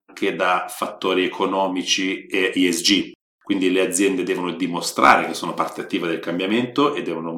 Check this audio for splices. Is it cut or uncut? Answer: uncut